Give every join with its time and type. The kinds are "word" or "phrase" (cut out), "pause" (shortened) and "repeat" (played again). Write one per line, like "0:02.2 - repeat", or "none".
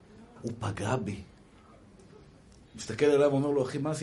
none